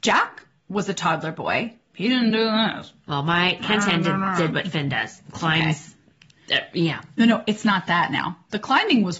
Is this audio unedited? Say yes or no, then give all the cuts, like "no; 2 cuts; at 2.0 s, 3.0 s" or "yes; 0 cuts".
yes; 0 cuts